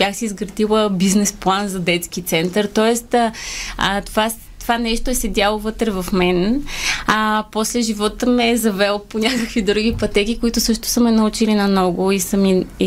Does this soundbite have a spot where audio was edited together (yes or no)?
no